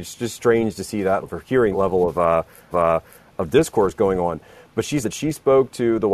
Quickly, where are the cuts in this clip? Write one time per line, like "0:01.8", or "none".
0:01.2
0:01.7
0:02.7
0:05.0